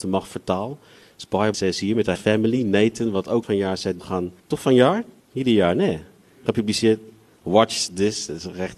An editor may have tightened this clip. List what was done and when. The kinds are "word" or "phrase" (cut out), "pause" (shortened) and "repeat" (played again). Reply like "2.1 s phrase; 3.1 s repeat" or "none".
1.5 s word; 2.1 s word; 3.4 s word; 4.0 s word; 4.4 s pause; 5.2 s pause